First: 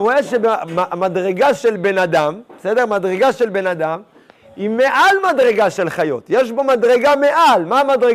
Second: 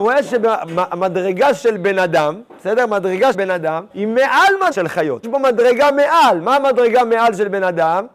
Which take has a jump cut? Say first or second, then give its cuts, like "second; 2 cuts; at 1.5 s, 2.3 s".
second; 4 cuts; at 3.3 s, 3.9 s, 4.7 s, 5.2 s